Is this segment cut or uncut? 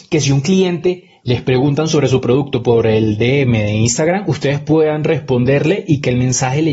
uncut